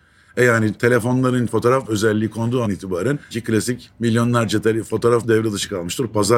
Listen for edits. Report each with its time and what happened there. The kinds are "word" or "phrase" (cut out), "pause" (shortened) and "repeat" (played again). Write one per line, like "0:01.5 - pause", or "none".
0:01.5 - word
0:01.8 - word
0:02.6 - word
0:03.3 - word
0:05.2 - word